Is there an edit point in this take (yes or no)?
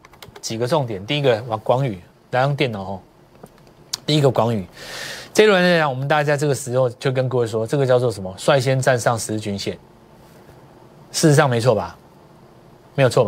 no